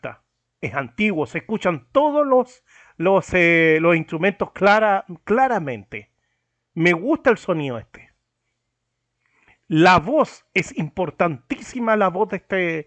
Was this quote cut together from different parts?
no; 0 cuts

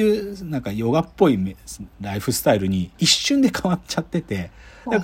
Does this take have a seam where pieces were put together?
yes; 2 cuts; at 1.9 s, 2.9 s

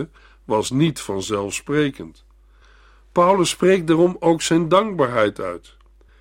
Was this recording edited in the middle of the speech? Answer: no; 0 cuts

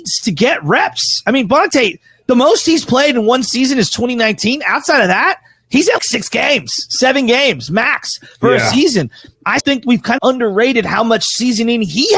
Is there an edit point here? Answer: yes; 3 cuts; at 6.0 s, 9.6 s, 10.2 s

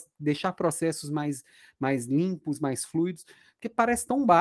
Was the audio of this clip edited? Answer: no; 0 cuts

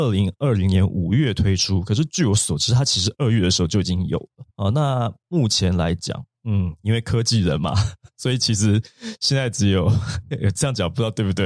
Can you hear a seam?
yes; 2 cuts; at 4.5 s, 6.3 s

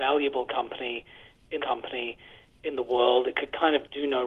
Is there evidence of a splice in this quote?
yes; 1 cut; at 1.6 s

